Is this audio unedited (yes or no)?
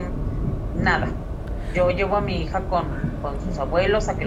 yes